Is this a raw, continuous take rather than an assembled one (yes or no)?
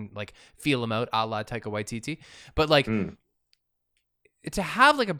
yes